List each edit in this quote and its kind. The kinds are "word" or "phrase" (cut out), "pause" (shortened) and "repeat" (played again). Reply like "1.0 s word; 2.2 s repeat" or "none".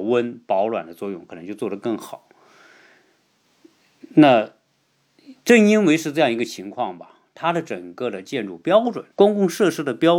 9.1 s pause

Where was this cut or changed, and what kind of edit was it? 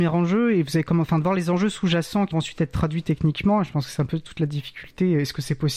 2.3 s word

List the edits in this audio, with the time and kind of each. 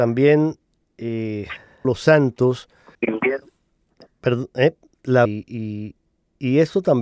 1.8 s word; 2.9 s word; 5.3 s word

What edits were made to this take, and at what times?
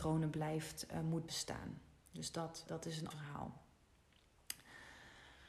1.3 s word; 2.7 s word; 3.1 s word

